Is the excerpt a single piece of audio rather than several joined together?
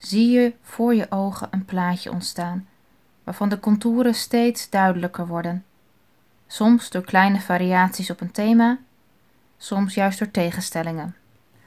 yes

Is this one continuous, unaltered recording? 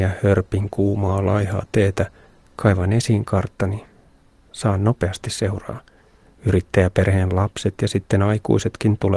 yes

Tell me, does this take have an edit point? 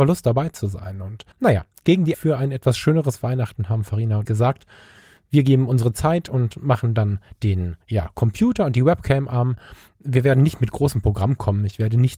yes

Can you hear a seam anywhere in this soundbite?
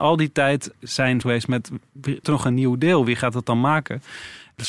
yes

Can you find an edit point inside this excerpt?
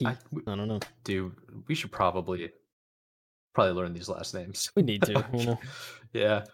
no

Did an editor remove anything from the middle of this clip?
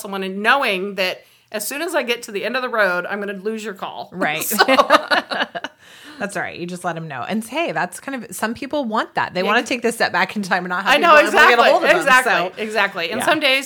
no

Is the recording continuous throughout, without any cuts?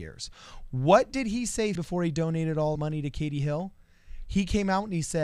no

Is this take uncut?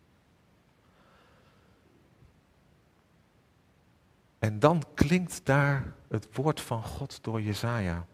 yes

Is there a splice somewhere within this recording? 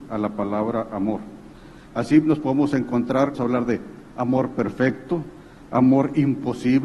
yes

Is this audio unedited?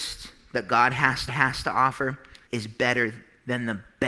no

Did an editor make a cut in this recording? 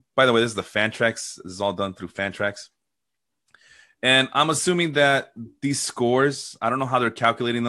no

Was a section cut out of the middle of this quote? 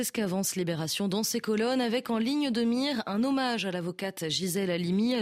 no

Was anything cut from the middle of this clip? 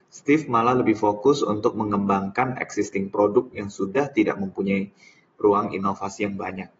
no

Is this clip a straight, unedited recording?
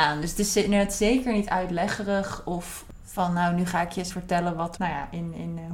no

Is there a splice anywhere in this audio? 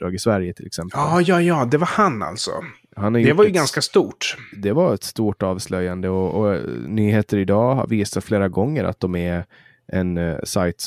no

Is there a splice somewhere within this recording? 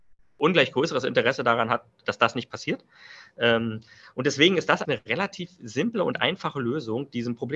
yes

